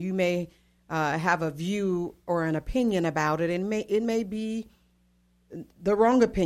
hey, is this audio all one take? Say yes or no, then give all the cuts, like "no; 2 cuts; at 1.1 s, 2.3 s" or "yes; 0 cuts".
yes; 0 cuts